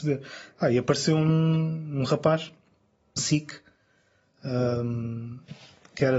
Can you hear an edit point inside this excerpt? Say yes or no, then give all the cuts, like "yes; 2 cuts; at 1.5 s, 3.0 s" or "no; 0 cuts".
yes; 1 cut; at 3.2 s